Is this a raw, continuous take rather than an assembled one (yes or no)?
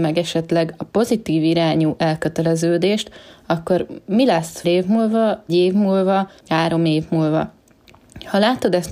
no